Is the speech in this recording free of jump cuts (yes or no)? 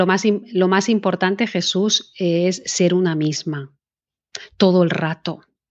yes